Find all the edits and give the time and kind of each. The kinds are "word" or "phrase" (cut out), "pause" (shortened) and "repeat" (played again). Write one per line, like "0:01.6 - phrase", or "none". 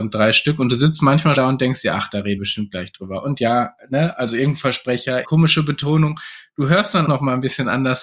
0:01.4 - word
0:02.4 - word
0:05.2 - word
0:07.1 - word